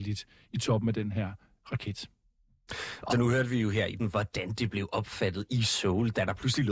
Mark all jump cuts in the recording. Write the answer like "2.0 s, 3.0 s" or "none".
3.1 s, 4.0 s